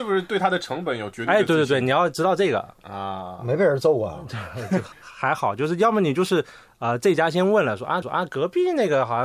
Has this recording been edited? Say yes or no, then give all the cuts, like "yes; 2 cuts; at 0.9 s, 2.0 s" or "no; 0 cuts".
yes; 3 cuts; at 2.7 s, 4.9 s, 8.0 s